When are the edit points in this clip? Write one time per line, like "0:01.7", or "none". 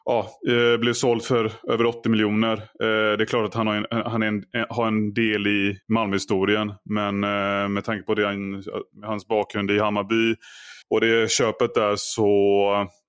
0:05.8
0:08.9
0:10.8